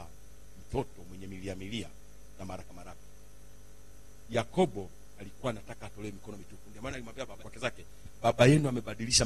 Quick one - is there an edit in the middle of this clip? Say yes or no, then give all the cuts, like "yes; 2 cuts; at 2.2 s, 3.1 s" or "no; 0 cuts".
yes; 1 cut; at 7.4 s